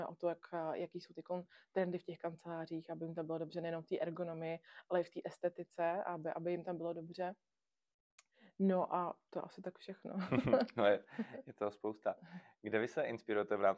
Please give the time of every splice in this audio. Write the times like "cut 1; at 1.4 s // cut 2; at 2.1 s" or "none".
none